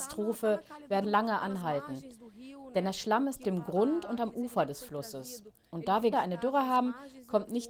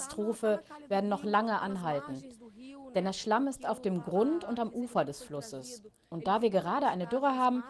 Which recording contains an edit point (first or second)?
first